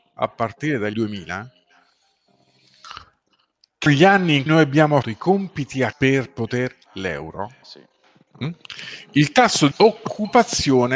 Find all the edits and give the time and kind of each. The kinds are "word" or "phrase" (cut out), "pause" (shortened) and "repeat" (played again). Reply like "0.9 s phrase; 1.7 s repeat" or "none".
0.9 s word; 3.9 s word; 4.5 s word; 5.0 s word; 5.9 s word; 6.9 s word; 7.6 s word; 9.7 s word